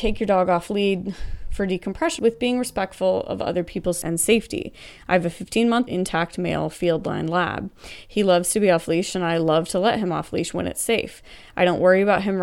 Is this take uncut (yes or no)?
no